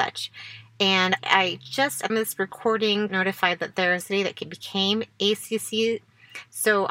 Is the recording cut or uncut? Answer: cut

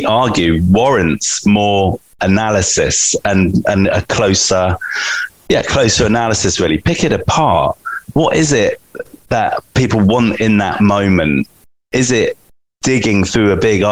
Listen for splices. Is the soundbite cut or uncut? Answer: uncut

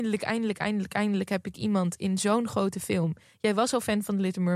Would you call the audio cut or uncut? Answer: uncut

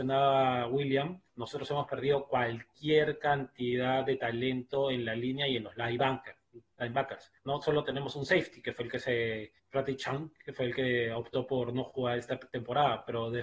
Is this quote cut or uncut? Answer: cut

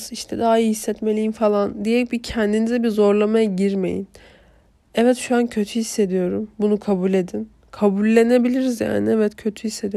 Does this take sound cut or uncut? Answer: uncut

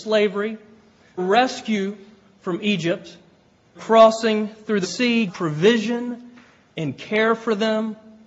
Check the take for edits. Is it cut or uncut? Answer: cut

